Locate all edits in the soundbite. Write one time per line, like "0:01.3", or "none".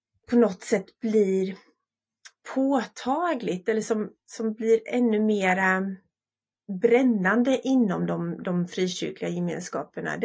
none